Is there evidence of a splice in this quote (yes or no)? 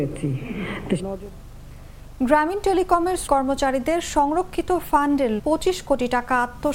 yes